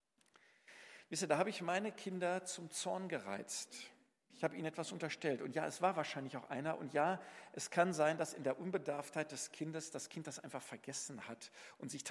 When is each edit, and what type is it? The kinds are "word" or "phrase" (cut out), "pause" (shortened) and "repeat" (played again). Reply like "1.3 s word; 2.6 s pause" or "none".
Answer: none

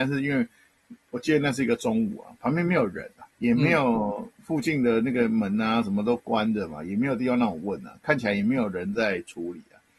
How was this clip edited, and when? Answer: 3.3 s pause

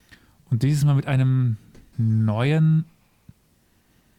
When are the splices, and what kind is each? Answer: 1.9 s word

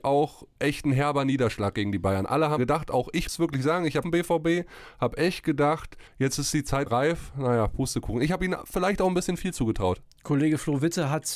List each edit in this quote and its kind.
2.6 s word; 3.3 s word; 4.0 s phrase; 6.1 s pause; 6.9 s word

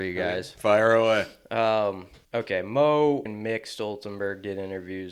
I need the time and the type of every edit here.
2.2 s pause; 3.3 s word

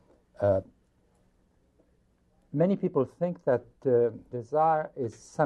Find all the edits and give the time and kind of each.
4.3 s word

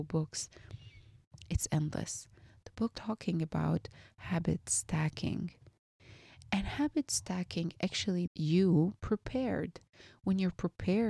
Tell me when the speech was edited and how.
2.9 s phrase; 8.3 s word

